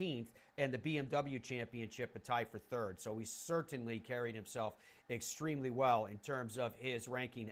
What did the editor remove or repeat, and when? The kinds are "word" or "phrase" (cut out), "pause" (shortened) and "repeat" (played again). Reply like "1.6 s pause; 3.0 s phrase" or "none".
none